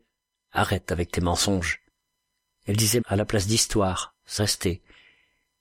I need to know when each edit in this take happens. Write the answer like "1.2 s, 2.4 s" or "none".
3.0 s, 4.4 s